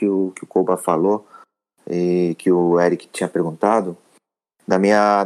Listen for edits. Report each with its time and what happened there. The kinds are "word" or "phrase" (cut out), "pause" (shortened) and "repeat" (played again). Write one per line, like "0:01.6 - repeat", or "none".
none